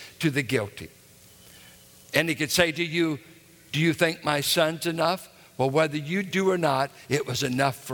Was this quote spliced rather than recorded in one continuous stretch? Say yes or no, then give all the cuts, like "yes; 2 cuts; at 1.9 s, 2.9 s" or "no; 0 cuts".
no; 0 cuts